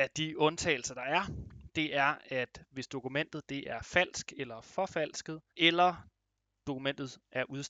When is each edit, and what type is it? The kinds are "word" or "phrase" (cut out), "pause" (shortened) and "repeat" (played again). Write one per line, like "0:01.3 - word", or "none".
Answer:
0:05.5 - pause